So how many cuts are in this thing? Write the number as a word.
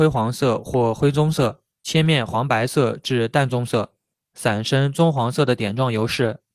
two